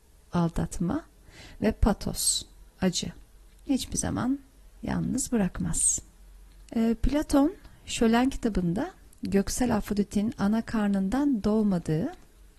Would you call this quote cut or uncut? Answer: uncut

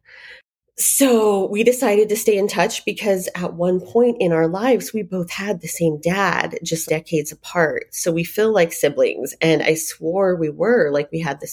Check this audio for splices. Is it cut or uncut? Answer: cut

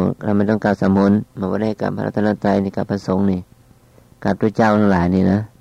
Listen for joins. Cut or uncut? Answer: cut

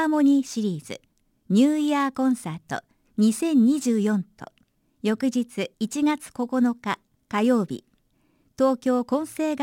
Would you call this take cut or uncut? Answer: cut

